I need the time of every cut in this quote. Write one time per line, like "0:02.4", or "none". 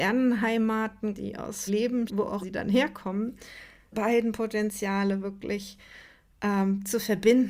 0:01.1
0:01.7
0:02.1
0:02.4
0:03.9

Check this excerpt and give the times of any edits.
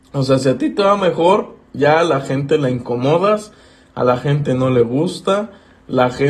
none

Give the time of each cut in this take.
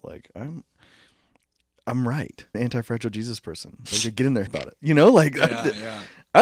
0:02.5
0:04.5

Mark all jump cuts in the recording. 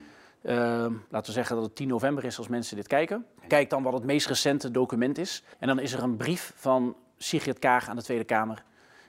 0:01.1
0:03.4
0:05.5

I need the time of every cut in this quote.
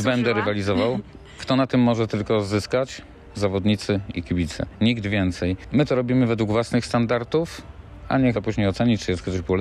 0:08.3

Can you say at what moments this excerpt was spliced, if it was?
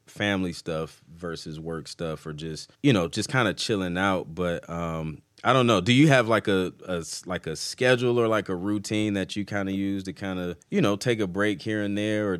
0:02.7
0:10.6

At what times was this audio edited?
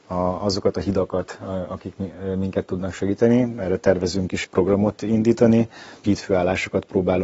0:04.4
0:06.0

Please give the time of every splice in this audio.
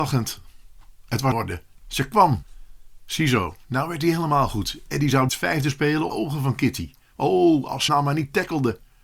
0:01.3
0:05.3
0:06.1
0:07.9

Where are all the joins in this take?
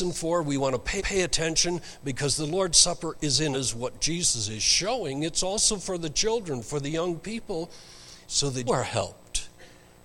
0:01.0
0:03.5
0:08.2
0:08.7

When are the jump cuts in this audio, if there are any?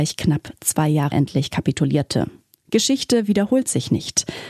0:01.1

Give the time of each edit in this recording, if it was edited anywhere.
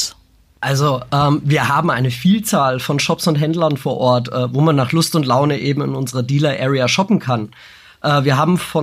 none

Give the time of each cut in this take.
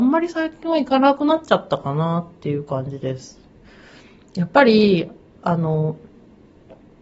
none

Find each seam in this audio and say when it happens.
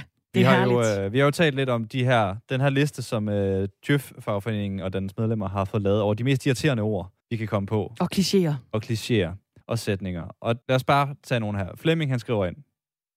0:07.2
0:09.6
0:10.6

